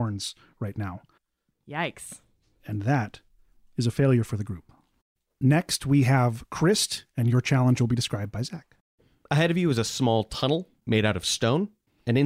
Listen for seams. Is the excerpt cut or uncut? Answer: uncut